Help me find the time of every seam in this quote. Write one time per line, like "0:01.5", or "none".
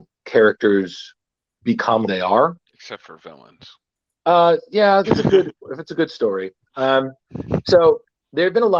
0:02.1
0:02.7
0:05.0